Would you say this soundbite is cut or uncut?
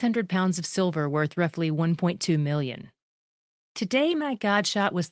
uncut